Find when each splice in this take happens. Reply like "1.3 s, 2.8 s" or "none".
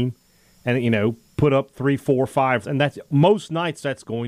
2.6 s